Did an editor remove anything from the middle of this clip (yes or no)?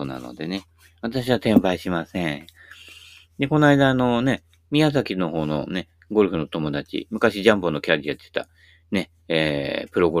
no